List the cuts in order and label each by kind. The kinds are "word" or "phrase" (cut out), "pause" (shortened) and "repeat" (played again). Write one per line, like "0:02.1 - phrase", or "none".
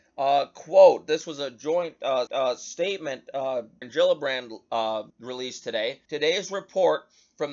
0:02.3 - repeat
0:03.8 - word
0:05.1 - pause
0:06.1 - pause